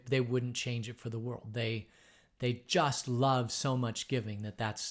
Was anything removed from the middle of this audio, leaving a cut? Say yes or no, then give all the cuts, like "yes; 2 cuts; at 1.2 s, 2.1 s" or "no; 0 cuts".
no; 0 cuts